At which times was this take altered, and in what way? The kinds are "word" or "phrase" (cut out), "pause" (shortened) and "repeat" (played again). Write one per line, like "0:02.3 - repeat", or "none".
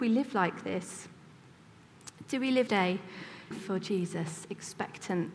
0:02.7 - word
0:03.5 - word